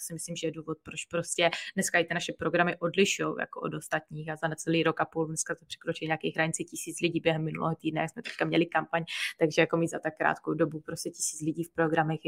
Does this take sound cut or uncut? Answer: uncut